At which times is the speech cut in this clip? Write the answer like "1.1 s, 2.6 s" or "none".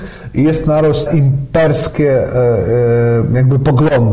1.1 s